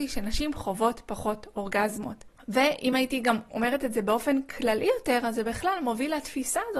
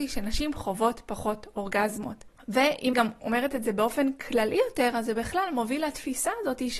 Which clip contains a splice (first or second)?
second